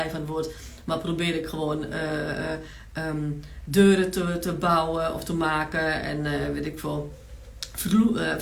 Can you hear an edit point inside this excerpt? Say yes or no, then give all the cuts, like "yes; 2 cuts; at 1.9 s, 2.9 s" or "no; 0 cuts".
no; 0 cuts